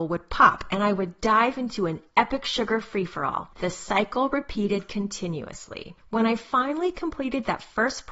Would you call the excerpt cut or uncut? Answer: uncut